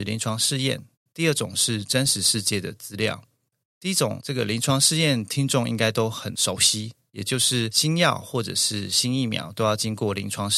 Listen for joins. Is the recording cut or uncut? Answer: cut